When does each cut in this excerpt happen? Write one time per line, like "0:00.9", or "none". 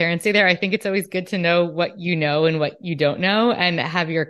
none